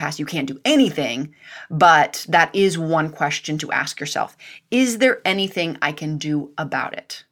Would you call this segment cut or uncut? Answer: uncut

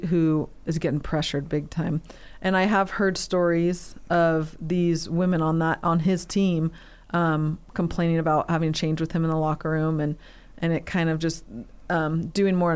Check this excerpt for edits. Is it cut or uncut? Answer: uncut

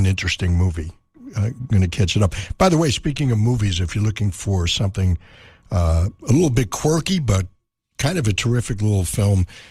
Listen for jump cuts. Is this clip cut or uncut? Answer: uncut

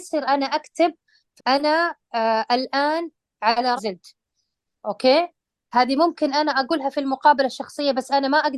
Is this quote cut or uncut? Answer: cut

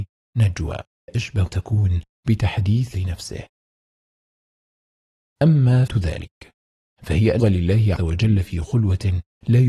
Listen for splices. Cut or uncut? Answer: cut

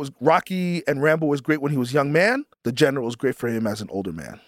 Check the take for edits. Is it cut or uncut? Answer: cut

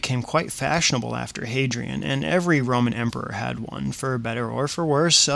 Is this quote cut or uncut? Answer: uncut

